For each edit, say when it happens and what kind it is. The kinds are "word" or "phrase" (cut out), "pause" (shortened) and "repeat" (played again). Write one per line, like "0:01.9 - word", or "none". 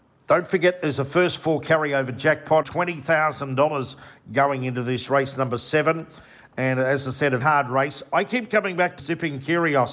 0:02.6 - word
0:05.1 - word
0:07.4 - word
0:09.0 - word